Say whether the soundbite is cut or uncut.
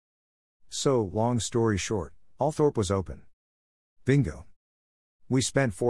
uncut